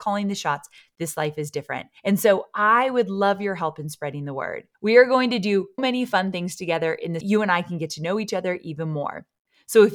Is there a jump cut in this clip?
yes; 4 cuts; at 2.0 s, 4.7 s, 5.8 s, 7.2 s

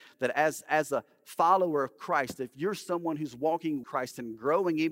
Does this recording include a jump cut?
yes; 1 cut; at 3.8 s

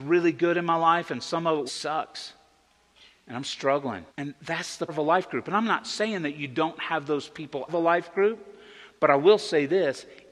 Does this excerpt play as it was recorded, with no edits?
no; 4 cuts; at 1.7 s, 4.1 s, 4.9 s, 7.7 s

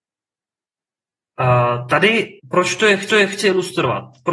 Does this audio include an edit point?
yes; 2 cuts; at 2.4 s, 3.1 s

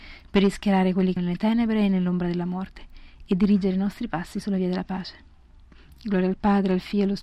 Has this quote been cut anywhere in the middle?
yes; 1 cut; at 1.2 s

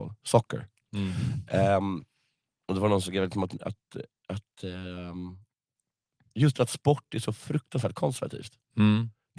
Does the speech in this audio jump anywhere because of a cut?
no; 0 cuts

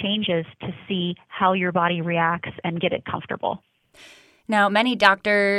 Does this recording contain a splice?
no; 0 cuts

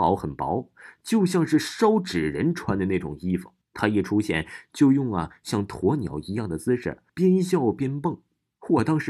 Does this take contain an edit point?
yes; 2 cuts; at 3.6 s, 7.1 s

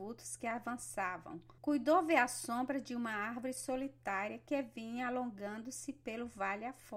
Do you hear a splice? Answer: yes; 1 cut; at 1.6 s

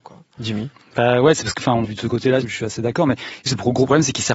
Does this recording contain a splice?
yes; 3 cuts; at 1.8 s, 2.4 s, 3.5 s

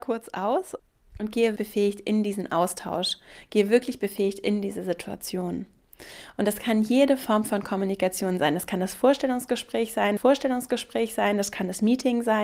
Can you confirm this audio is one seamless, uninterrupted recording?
no; 2 cuts; at 1.6 s, 10.2 s

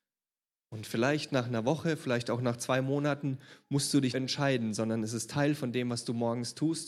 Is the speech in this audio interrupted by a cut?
yes; 1 cut; at 4.1 s

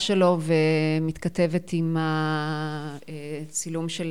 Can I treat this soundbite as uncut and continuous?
yes; 0 cuts

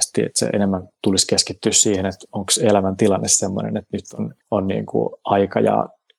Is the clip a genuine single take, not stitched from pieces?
no; 1 cut; at 4.4 s

